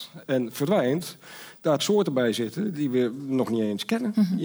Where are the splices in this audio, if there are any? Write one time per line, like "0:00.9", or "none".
0:01.8